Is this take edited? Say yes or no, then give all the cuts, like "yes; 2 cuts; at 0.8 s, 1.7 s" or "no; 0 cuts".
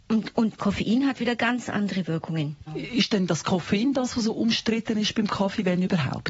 no; 0 cuts